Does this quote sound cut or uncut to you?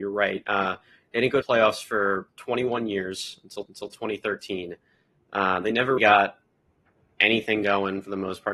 cut